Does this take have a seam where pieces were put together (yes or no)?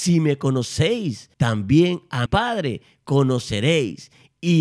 yes